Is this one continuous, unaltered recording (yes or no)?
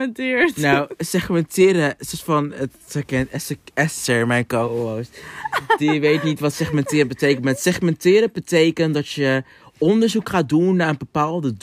yes